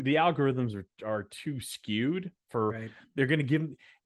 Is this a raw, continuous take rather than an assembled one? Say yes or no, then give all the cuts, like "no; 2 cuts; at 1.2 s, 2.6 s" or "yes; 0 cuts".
yes; 0 cuts